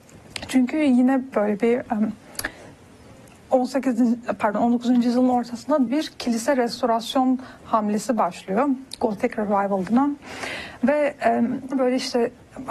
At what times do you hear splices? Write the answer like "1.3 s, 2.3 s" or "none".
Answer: 1.3 s, 5.9 s, 9.9 s, 11.7 s